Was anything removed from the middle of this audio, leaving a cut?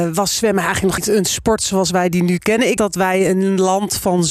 yes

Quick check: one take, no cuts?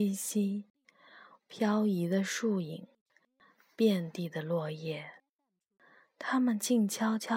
yes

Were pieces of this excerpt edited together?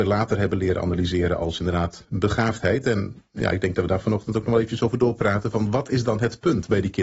no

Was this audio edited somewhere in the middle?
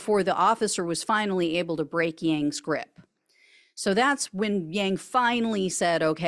no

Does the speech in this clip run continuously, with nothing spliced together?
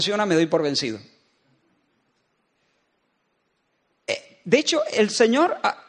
yes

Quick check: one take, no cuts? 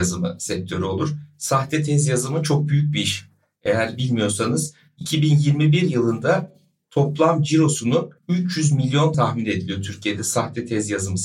no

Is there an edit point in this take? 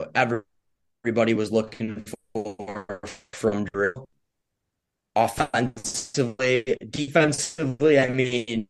no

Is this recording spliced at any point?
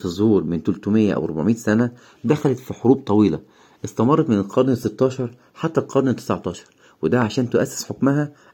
no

